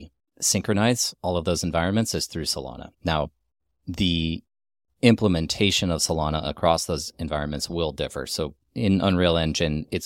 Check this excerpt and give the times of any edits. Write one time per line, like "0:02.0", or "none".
0:02.9